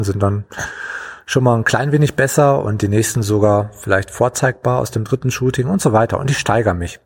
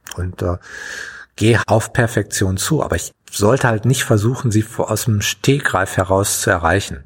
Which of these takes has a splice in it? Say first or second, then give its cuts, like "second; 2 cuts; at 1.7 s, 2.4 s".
second; 2 cuts; at 1.6 s, 3.1 s